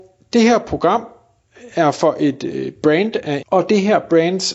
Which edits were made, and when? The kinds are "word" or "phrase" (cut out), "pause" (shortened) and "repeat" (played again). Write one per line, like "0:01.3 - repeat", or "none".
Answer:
0:03.4 - phrase